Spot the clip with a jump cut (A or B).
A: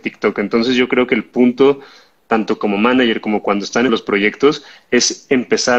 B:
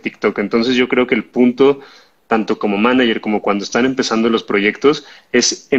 A